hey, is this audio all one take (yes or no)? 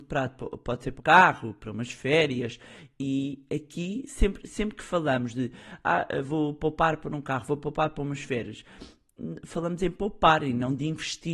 no